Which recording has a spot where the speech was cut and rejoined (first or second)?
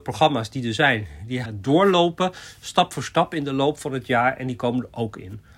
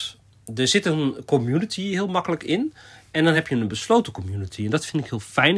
first